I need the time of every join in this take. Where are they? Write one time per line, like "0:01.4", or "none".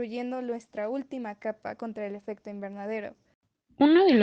none